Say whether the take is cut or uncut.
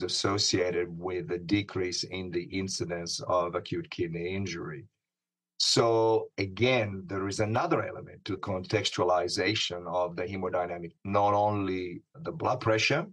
cut